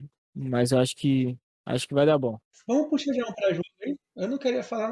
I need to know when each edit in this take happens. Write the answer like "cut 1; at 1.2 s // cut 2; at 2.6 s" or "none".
none